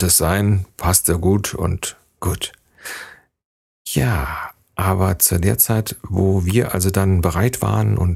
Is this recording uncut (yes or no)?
yes